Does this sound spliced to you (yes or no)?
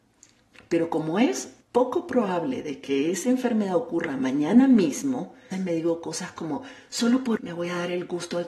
yes